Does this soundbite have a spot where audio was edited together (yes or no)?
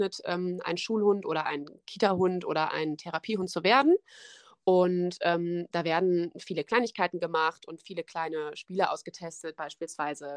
no